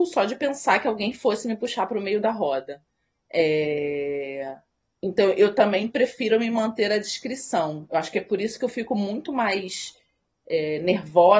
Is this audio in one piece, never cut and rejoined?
yes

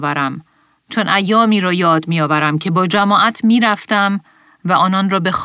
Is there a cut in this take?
no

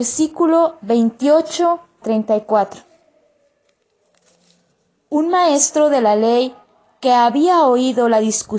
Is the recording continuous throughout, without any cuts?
no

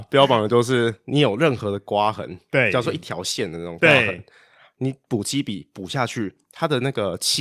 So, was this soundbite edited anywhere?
no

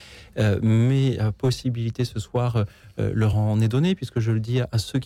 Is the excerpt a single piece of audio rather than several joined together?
yes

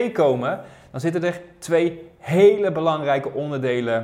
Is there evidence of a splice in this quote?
no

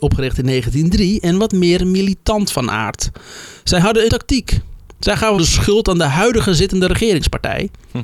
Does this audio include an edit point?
yes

